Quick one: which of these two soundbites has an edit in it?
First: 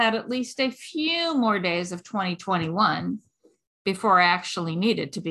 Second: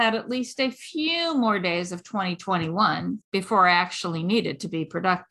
second; 1 cut; at 3.2 s

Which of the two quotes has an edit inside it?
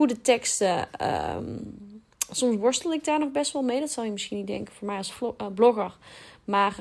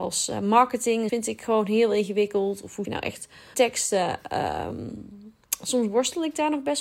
second; 3 cuts; at 1.1 s, 2.8 s, 3.5 s

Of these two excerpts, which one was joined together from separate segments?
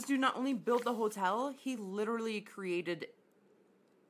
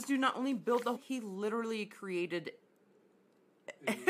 second; 1 cut; at 0.9 s

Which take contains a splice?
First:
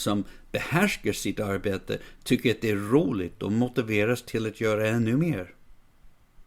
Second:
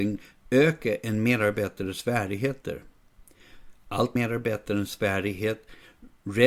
second; 1 cut; at 4.2 s

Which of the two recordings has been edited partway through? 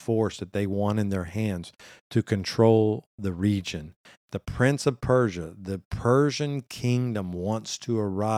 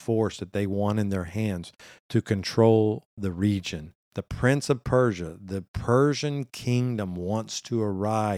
second; 1 cut; at 4.0 s

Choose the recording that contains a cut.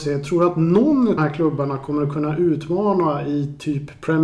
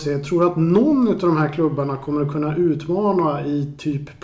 first; 1 cut; at 1.2 s

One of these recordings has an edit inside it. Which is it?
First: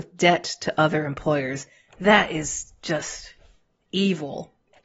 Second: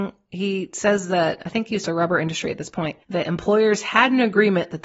second; 2 cuts; at 1.9 s, 3.0 s

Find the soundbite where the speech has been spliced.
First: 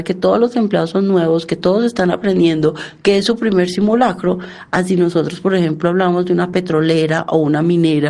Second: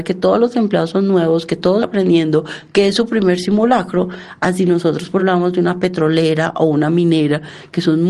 second; 2 cuts; at 1.8 s, 5.2 s

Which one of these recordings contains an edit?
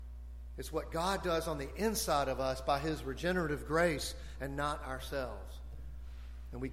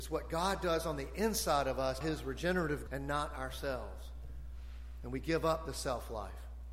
second; 2 cuts; at 2.0 s, 2.9 s

